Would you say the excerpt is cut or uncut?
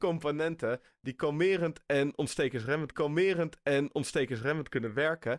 cut